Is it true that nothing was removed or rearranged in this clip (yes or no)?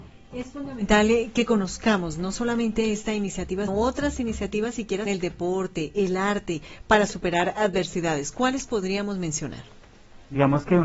no